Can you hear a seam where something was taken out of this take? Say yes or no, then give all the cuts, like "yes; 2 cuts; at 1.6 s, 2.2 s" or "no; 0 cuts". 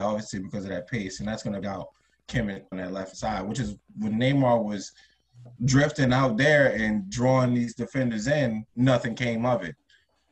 yes; 5 cuts; at 1.6 s, 2.7 s, 3.1 s, 5.6 s, 8.7 s